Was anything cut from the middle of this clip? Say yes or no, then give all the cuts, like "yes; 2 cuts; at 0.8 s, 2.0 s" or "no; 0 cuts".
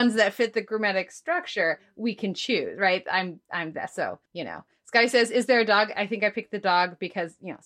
yes; 1 cut; at 4.3 s